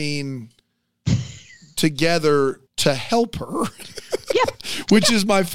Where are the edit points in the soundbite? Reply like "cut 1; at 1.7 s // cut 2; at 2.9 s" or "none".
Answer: cut 1; at 2.7 s